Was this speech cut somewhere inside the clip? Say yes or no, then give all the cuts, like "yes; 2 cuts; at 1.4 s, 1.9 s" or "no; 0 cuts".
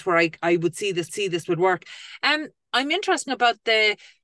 yes; 2 cuts; at 1.1 s, 3.3 s